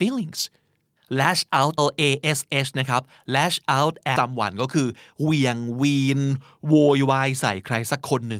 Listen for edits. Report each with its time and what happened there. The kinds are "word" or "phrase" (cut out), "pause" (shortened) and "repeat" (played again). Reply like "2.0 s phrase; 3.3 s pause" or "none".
1.8 s word; 4.2 s word